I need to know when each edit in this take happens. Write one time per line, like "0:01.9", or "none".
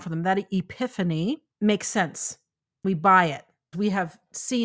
0:01.5
0:02.8
0:03.7